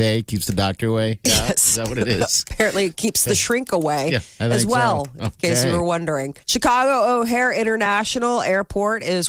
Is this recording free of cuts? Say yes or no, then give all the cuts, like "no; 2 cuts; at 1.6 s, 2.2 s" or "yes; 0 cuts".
no; 1 cut; at 6.4 s